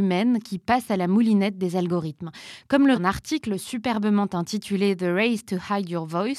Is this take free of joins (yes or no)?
no